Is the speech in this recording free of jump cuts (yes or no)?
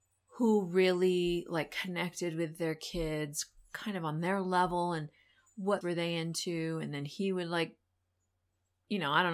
no